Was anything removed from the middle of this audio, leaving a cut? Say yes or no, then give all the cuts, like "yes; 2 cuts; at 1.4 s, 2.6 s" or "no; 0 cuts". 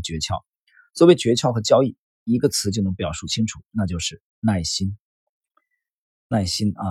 no; 0 cuts